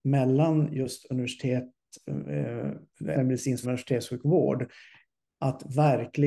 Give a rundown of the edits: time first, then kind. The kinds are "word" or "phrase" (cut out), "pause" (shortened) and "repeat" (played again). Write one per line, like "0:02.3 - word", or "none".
0:03.1 - phrase
0:03.6 - phrase